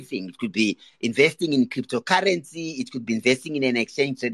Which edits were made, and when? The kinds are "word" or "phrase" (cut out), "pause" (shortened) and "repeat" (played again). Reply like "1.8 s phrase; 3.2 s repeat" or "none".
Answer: none

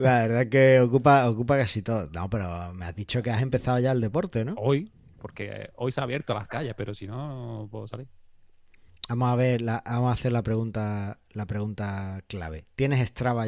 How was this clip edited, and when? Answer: none

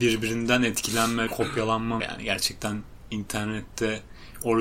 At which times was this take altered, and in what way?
1.3 s word; 2.0 s phrase

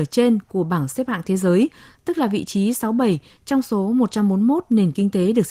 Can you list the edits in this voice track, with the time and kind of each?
none

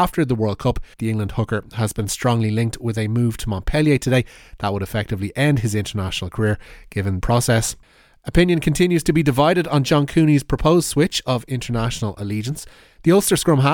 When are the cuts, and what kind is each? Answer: 0.9 s pause; 7.2 s phrase

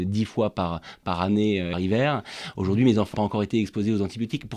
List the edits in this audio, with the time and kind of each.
1.0 s word; 1.7 s phrase; 3.1 s word

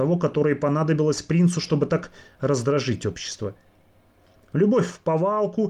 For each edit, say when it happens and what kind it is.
none

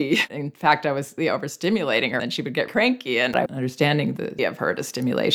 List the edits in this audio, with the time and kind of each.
1.2 s word; 2.2 s word; 2.7 s word; 3.5 s word; 4.4 s word

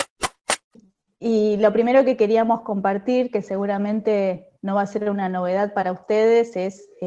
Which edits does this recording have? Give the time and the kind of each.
4.6 s pause

